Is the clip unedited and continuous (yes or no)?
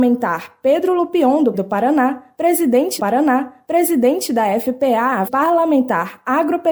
no